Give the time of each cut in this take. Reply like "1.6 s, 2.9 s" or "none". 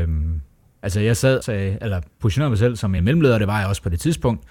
1.4 s, 3.0 s